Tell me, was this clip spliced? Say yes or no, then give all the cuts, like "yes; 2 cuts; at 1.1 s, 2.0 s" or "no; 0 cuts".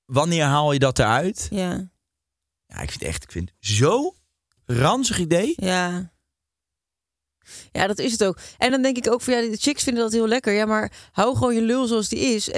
no; 0 cuts